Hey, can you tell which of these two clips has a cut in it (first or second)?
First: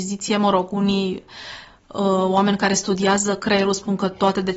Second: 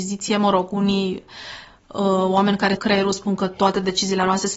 second